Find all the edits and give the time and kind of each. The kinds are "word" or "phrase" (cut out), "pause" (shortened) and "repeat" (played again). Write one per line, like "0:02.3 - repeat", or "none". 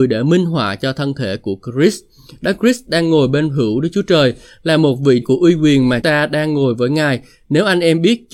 0:05.2 - word
0:06.0 - word